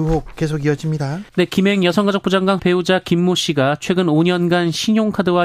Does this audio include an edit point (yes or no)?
yes